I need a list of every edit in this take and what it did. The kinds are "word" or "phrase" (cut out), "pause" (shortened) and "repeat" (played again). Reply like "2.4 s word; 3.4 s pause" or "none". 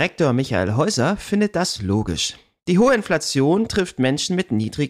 none